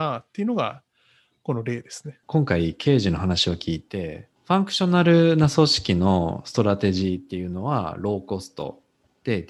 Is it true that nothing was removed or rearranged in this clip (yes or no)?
no